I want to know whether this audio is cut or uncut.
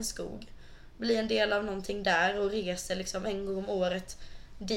uncut